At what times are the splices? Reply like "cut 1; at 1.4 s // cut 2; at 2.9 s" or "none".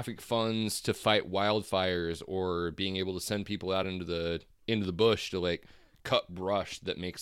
none